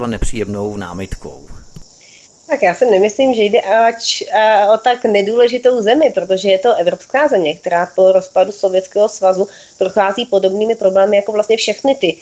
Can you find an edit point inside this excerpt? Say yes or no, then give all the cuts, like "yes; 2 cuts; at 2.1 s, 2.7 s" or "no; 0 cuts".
no; 0 cuts